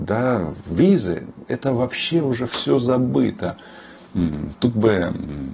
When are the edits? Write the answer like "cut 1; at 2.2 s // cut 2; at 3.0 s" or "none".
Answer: none